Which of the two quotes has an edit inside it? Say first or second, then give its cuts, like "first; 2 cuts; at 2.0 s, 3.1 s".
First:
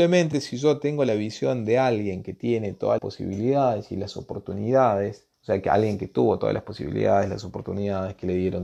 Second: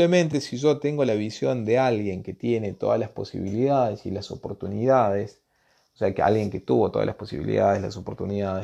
first; 2 cuts; at 3.0 s, 5.3 s